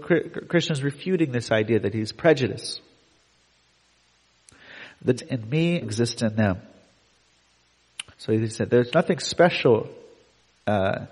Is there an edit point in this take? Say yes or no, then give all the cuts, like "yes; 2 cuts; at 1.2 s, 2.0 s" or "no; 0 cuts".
yes; 3 cuts; at 5.2 s, 5.8 s, 8.1 s